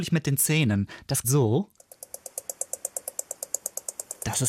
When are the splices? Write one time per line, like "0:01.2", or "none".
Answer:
0:01.2

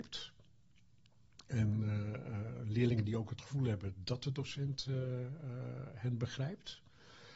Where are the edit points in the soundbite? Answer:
none

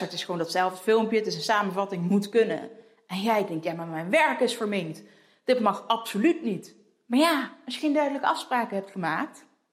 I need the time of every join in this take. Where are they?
none

